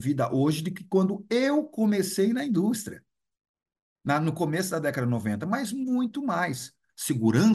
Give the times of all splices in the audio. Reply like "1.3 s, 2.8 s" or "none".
none